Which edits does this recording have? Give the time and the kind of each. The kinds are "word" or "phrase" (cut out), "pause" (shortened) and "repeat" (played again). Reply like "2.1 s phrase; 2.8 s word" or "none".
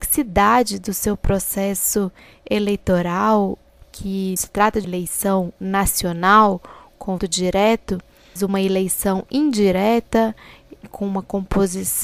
4.4 s word; 4.8 s word; 7.2 s word; 8.4 s word